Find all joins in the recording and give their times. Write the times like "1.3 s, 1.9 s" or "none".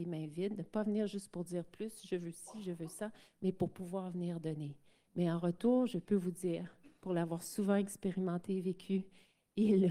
none